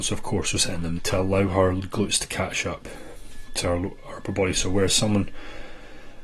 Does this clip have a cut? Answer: yes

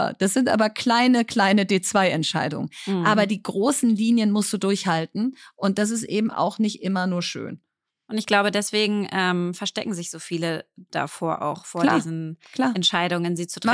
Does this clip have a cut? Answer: no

